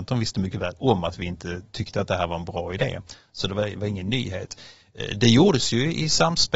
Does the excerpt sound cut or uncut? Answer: uncut